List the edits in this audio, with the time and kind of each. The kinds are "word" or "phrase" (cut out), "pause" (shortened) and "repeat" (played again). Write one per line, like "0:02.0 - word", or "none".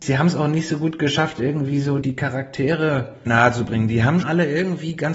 0:02.0 - word
0:03.3 - word
0:04.2 - word